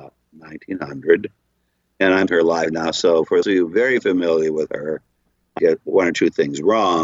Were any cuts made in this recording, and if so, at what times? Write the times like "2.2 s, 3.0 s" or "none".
2.3 s, 3.4 s, 5.6 s

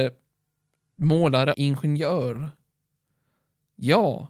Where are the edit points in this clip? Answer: 1.5 s

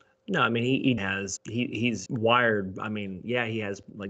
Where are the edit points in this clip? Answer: 1.0 s, 1.4 s, 2.1 s

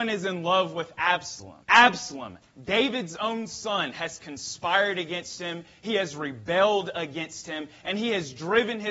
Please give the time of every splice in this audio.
1.6 s

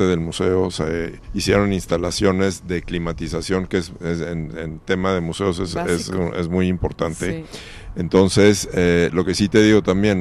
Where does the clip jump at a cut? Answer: 1.2 s

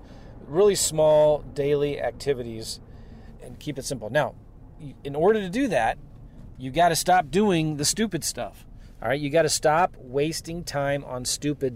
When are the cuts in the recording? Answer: none

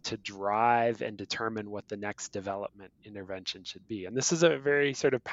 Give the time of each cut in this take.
none

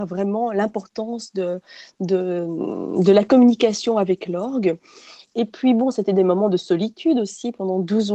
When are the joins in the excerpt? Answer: none

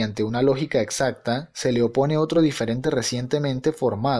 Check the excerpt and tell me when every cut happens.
none

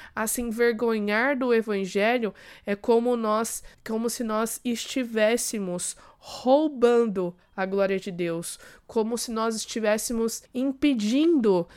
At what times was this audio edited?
3.7 s, 10.5 s

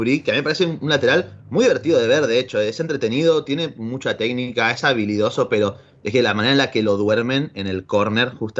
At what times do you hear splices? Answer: 1.4 s

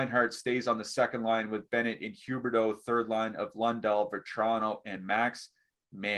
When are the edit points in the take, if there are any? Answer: none

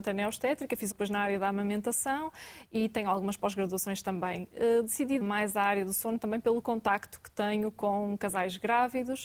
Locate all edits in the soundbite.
0.9 s, 5.2 s

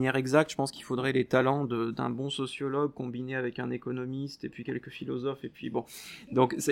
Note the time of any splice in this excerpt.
none

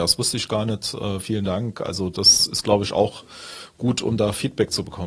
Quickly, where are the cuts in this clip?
none

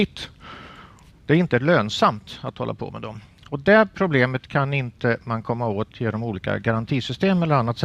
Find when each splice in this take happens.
none

